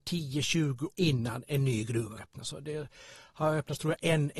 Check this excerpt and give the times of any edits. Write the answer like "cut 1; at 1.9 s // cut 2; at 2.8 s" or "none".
cut 1; at 0.9 s // cut 2; at 2.2 s